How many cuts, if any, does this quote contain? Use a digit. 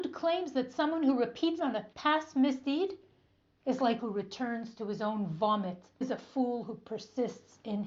4